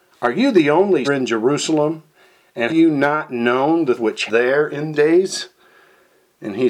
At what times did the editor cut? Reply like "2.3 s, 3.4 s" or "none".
1.0 s, 2.7 s, 4.0 s, 4.3 s, 4.9 s

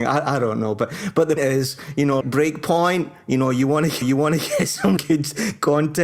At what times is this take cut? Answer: 1.4 s, 2.2 s, 4.0 s, 5.0 s

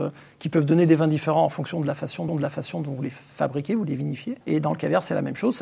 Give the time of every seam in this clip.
2.3 s, 4.4 s

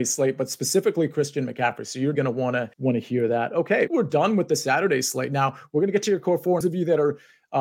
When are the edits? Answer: 2.2 s, 2.7 s, 3.9 s, 6.6 s

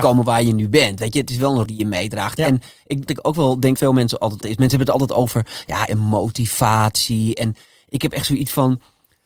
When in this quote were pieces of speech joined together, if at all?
1.7 s, 3.1 s, 3.8 s, 4.4 s, 5.9 s

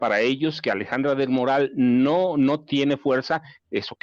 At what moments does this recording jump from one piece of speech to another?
none

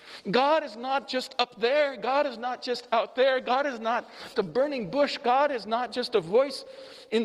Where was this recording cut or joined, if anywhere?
4.3 s

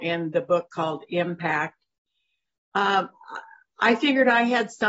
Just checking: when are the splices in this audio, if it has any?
none

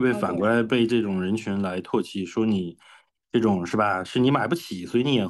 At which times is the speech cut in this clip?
none

